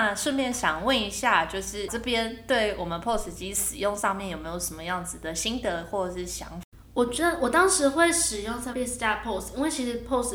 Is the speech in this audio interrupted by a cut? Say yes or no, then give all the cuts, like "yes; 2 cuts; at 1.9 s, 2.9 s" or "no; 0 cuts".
yes; 2 cuts; at 1.9 s, 8.7 s